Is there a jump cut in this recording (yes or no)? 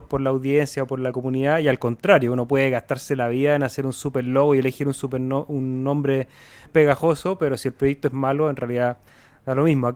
yes